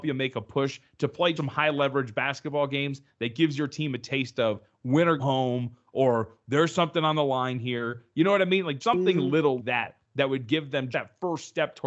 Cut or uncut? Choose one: cut